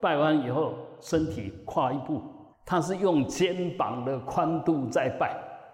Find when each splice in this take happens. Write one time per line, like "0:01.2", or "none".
0:02.5